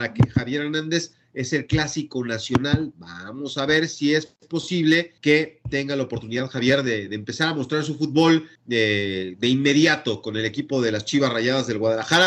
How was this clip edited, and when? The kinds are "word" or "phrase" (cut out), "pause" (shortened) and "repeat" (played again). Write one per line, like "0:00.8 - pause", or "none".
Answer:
0:05.2 - pause
0:08.6 - pause

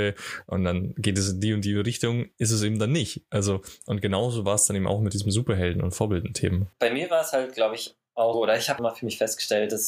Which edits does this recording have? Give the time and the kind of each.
0:08.3 - word
0:08.8 - word

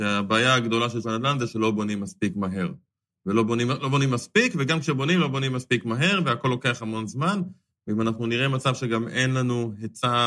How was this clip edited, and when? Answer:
0:01.0 - word

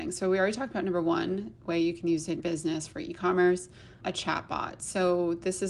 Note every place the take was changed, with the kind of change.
0:02.4 - word
0:04.0 - word

